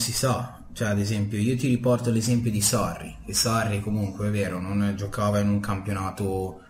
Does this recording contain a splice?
no; 0 cuts

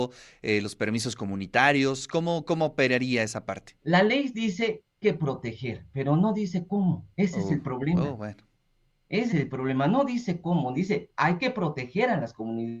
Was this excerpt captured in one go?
no; 3 cuts; at 3.8 s, 5.0 s, 9.3 s

